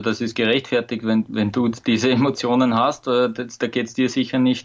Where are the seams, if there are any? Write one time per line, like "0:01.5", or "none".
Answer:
none